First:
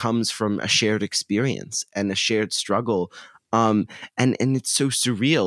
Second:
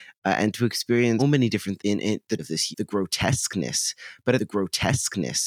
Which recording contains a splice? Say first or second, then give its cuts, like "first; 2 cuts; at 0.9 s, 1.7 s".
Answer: second; 5 cuts; at 1.2 s, 1.8 s, 2.4 s, 2.7 s, 4.4 s